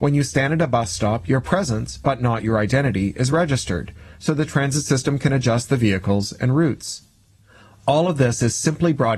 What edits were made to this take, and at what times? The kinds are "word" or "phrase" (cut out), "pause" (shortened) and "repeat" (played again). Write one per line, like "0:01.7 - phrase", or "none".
none